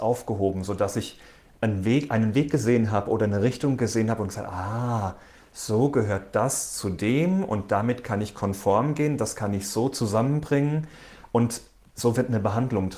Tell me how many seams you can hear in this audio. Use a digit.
0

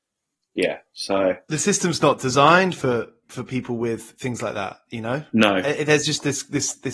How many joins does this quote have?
1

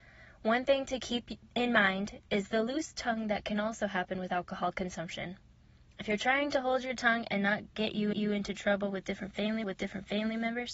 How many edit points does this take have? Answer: 3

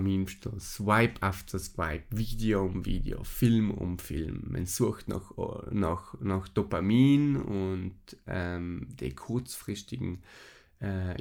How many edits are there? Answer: 0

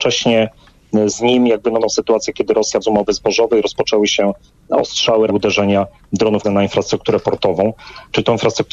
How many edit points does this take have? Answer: 4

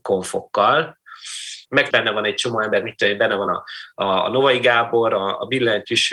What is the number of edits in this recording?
0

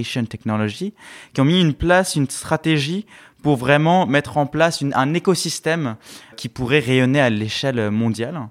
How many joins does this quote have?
1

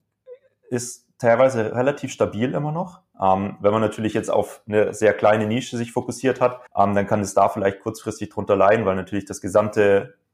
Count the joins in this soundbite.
1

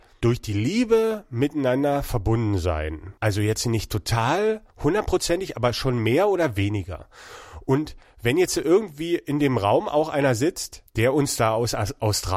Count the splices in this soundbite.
3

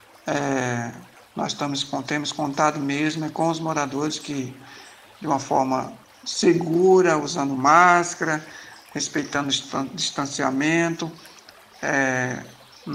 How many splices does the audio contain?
0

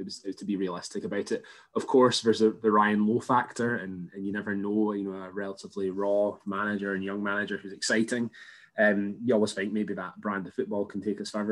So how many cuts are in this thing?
0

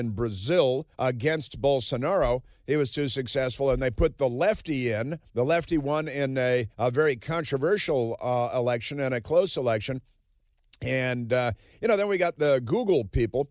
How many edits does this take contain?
3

